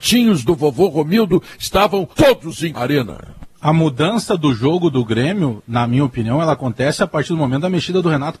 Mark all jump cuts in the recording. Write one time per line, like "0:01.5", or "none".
0:02.1
0:02.7